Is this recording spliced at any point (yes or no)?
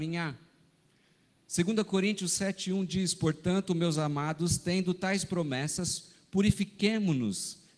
no